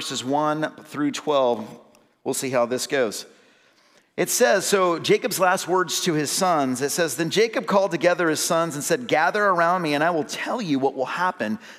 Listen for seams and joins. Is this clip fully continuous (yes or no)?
yes